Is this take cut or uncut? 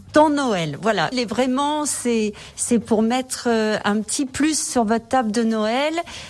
cut